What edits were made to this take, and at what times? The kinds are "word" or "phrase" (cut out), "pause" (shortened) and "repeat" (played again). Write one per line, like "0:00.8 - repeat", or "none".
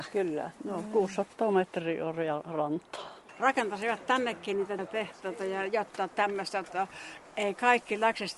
0:03.3 - pause
0:04.8 - word